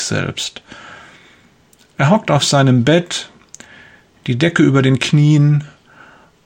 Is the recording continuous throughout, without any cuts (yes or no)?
yes